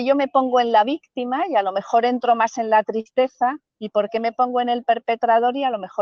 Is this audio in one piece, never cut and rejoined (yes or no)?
no